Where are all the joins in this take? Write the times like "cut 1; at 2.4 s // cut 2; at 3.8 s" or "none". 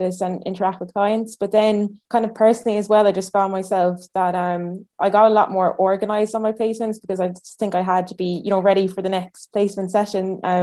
cut 1; at 2.0 s